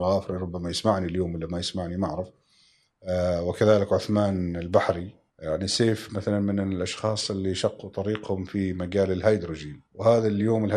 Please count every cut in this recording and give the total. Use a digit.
2